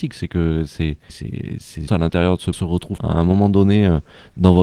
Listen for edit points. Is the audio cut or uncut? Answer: cut